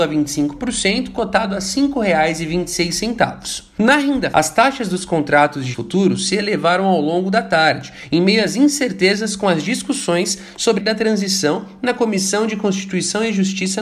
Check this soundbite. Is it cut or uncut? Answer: cut